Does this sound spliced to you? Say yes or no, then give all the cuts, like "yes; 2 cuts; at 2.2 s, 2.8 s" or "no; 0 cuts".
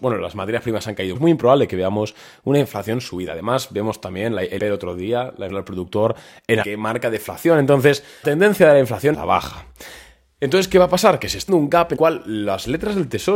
yes; 8 cuts; at 1.1 s, 4.6 s, 5.5 s, 6.6 s, 8.2 s, 9.1 s, 11.5 s, 12.0 s